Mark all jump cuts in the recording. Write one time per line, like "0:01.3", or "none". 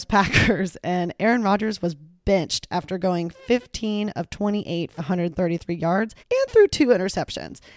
0:05.0
0:06.2